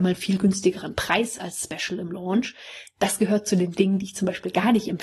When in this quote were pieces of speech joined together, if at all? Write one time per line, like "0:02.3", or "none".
none